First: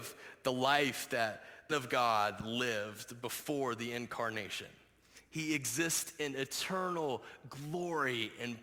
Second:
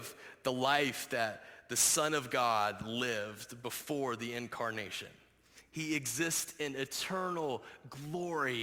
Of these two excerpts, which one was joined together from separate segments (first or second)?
first